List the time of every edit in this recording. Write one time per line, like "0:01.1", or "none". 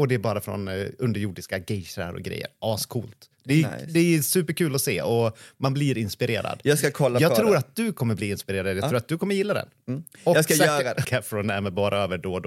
0:11.0